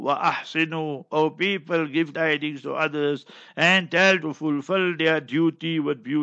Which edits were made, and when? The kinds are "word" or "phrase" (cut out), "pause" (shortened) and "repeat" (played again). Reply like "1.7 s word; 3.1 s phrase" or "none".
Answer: 2.1 s word; 4.2 s word